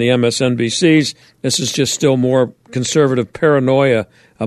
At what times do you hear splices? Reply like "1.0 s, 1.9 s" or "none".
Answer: 1.2 s

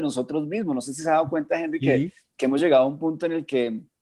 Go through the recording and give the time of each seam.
none

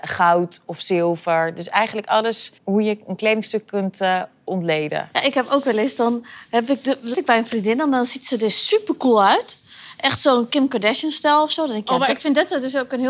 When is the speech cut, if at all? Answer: 2.6 s, 7.1 s

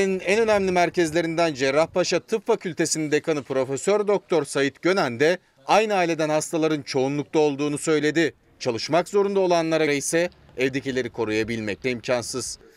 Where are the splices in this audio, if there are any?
9.9 s, 11.8 s

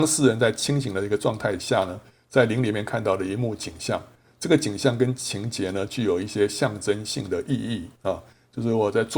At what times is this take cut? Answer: none

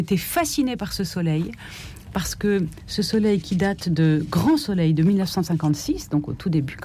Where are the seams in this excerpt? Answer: none

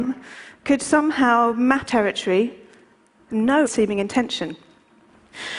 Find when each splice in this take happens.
1.9 s, 3.7 s

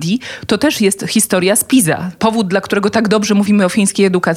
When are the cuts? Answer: none

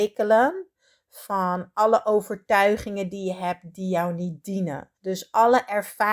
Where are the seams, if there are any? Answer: 5.0 s

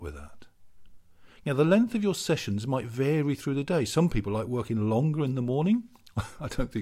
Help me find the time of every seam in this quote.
none

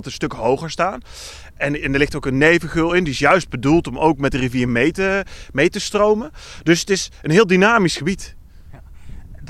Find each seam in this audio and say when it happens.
none

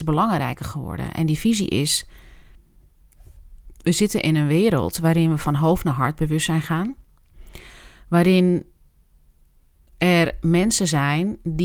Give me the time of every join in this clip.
none

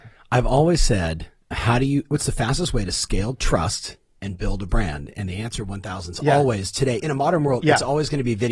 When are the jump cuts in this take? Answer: 1.5 s, 7.0 s

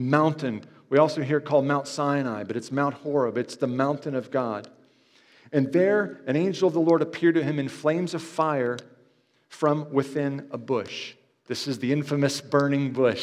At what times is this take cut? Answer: none

